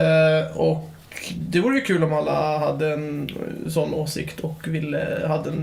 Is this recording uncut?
yes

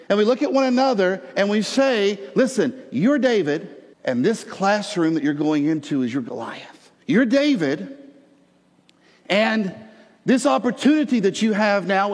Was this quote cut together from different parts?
yes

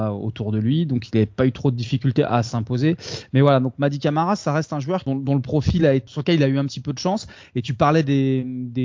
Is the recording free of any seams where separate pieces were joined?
yes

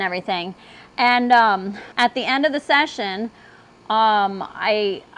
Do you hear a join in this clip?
yes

